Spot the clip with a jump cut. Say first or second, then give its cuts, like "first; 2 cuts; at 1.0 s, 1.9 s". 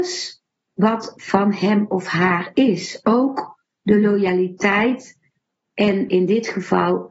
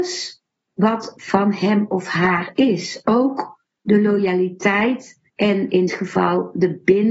second; 2 cuts; at 5.3 s, 5.9 s